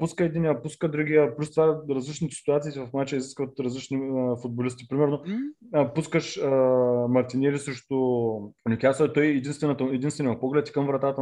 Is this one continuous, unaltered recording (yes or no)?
no